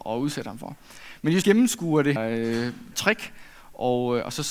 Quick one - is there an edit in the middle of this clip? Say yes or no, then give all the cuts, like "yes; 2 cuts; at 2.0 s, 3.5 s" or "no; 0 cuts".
yes; 3 cuts; at 1.4 s, 2.2 s, 2.9 s